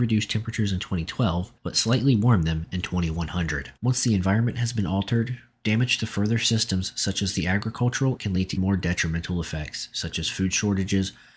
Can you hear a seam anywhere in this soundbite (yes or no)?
yes